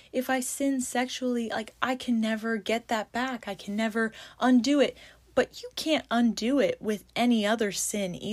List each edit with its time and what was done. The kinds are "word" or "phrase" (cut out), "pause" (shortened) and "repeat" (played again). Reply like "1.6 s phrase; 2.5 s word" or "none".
none